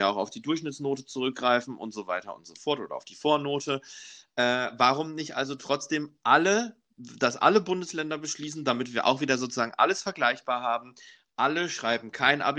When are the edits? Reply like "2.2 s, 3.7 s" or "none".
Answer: none